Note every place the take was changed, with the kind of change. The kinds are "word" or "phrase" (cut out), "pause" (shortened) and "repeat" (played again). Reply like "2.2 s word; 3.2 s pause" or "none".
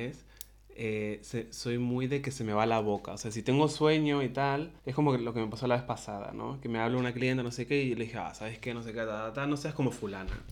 4.8 s pause